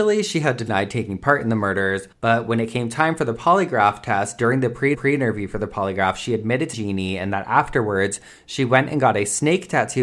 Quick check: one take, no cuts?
no; 3 cuts; at 2.1 s, 4.9 s, 6.7 s

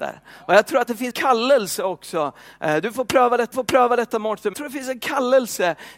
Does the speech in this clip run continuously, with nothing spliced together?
no; 3 cuts; at 1.1 s, 3.5 s, 4.5 s

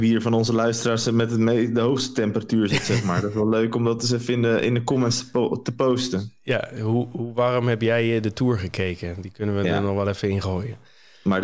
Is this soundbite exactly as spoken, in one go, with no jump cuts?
yes; 0 cuts

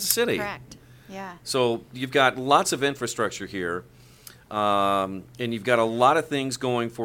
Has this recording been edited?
no; 0 cuts

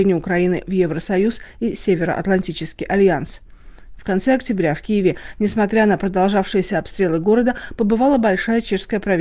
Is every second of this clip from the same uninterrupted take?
yes; 0 cuts

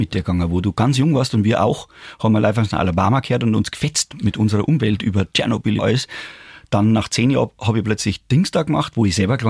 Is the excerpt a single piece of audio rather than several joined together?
no; 1 cut; at 5.8 s

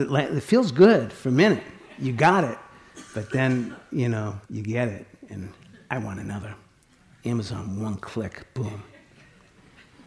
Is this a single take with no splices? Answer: no; 1 cut; at 4.4 s

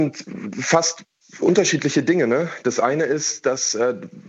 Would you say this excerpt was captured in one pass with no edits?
yes; 0 cuts

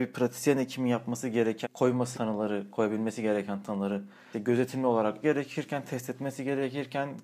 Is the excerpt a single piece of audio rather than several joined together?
no; 4 cuts; at 1.6 s, 2.1 s, 4.3 s, 5.2 s

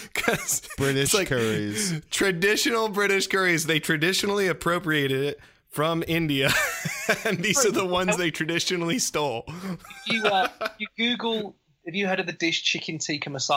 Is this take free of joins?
yes; 0 cuts

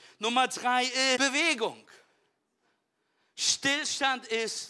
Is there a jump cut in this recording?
yes; 1 cut; at 1.2 s

